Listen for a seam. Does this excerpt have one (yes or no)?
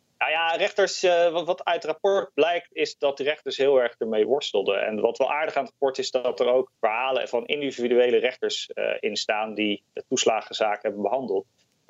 yes